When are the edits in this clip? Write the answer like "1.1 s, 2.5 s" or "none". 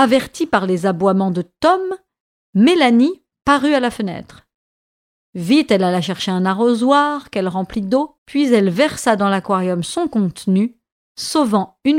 8.2 s